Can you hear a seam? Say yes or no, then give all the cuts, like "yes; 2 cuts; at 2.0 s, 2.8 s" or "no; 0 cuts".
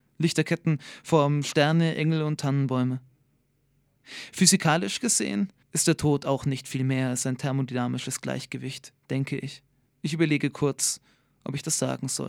yes; 2 cuts; at 5.6 s, 9.9 s